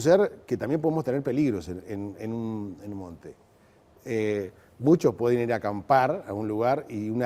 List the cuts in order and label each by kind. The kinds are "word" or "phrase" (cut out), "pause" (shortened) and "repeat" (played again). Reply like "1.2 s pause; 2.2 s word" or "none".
none